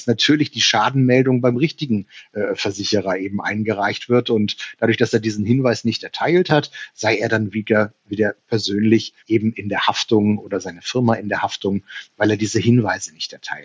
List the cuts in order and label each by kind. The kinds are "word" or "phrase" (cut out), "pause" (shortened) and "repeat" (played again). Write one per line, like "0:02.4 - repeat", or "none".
0:09.2 - pause